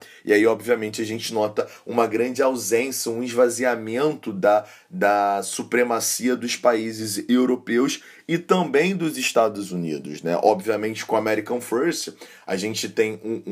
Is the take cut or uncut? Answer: uncut